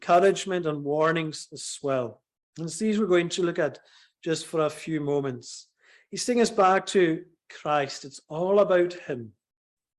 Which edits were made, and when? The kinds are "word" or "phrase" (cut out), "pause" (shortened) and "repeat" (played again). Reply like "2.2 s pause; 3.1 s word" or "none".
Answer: 2.4 s pause